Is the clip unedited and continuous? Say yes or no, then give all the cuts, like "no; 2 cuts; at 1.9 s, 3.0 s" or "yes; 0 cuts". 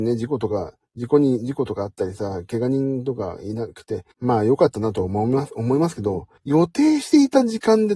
no; 2 cuts; at 4.1 s, 6.4 s